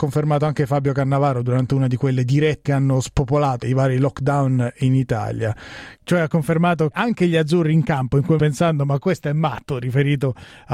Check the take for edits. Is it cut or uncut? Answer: cut